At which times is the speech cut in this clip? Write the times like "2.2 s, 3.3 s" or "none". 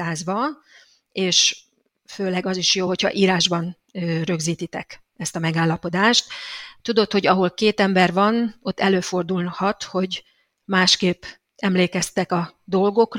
none